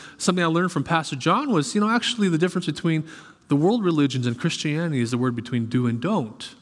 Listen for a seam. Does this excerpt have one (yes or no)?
no